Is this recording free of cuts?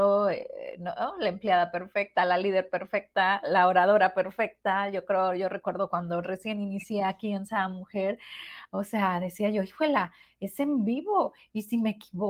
yes; 0 cuts

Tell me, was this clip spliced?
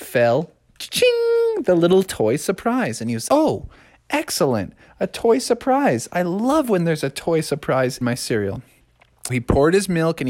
yes; 3 cuts; at 3.3 s, 8.0 s, 9.3 s

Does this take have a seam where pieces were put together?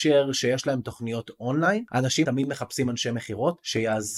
yes; 1 cut; at 2.2 s

